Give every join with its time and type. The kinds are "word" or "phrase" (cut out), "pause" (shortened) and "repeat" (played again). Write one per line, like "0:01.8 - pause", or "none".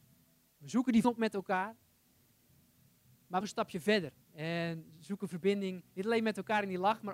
0:01.0 - word
0:03.4 - phrase
0:04.2 - pause
0:05.9 - pause